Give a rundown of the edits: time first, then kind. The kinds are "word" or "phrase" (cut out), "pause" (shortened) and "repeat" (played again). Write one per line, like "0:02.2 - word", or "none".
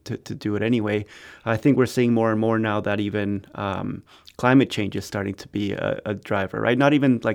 none